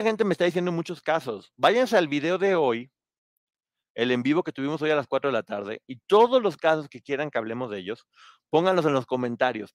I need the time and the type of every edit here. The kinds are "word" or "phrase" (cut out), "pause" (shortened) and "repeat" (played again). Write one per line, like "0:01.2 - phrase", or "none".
none